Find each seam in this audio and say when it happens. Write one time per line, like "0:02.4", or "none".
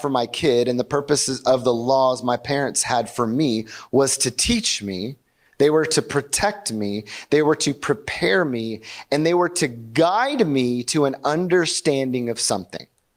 none